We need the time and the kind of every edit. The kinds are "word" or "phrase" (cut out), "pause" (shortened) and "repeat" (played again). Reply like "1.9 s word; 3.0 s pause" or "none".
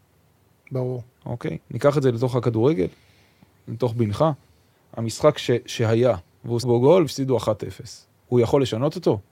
1.6 s pause; 6.6 s word; 7.1 s word